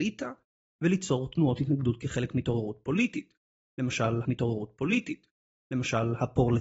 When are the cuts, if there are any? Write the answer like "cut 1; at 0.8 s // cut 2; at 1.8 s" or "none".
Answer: cut 1; at 4.2 s